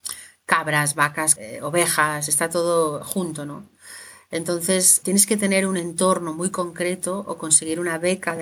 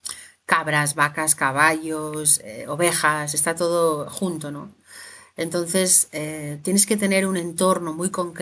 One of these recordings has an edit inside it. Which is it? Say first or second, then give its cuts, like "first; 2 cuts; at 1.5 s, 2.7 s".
first; 2 cuts; at 1.4 s, 5.0 s